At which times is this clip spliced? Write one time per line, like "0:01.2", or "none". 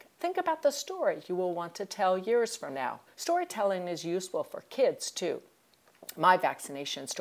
0:03.1

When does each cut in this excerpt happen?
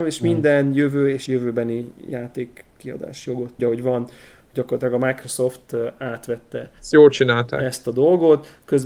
0:01.3
0:03.6
0:06.8

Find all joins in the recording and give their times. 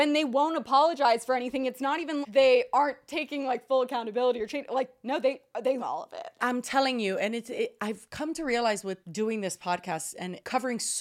0:02.2
0:05.8

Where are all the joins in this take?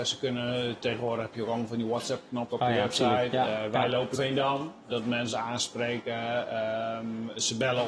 0:02.5
0:04.1
0:04.9
0:05.3

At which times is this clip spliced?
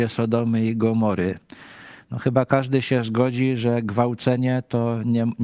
none

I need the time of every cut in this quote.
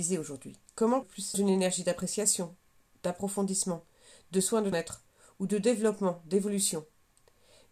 0:01.0
0:01.3
0:04.7

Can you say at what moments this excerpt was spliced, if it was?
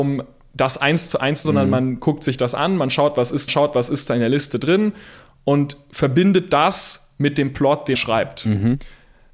0:01.4
0:03.5
0:07.9

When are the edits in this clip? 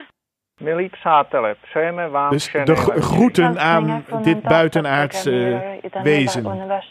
none

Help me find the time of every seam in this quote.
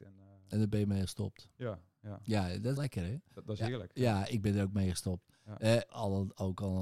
0:02.8
0:05.9

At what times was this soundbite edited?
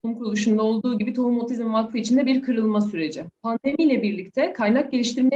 0:03.4

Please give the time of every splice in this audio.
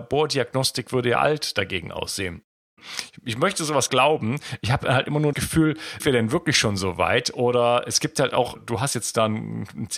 0:03.9
0:05.3
0:06.0
0:08.5

